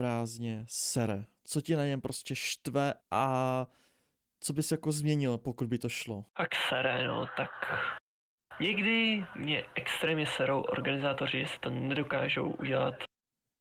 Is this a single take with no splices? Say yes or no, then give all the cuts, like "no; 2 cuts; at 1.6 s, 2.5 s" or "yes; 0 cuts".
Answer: no; 2 cuts; at 3.0 s, 6.3 s